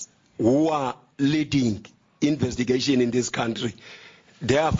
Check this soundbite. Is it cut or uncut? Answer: uncut